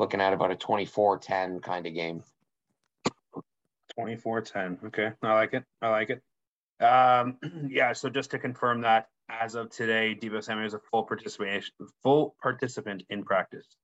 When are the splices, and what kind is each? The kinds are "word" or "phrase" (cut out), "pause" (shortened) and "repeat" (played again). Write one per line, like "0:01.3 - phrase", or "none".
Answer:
0:09.2 - word